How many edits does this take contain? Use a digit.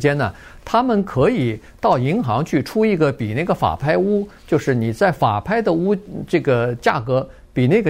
1